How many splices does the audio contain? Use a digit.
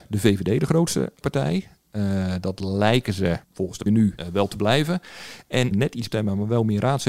5